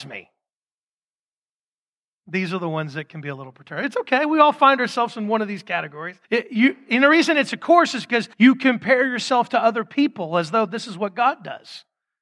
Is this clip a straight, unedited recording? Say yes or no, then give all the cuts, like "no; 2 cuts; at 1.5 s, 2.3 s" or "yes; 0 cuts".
no; 2 cuts; at 6.2 s, 8.3 s